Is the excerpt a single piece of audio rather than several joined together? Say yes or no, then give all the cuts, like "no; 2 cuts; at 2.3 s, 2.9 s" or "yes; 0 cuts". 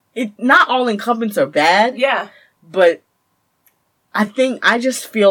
yes; 0 cuts